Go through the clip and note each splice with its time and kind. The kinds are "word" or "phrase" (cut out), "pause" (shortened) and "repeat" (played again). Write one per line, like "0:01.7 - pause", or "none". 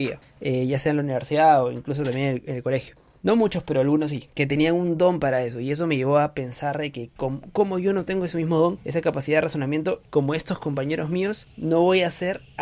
none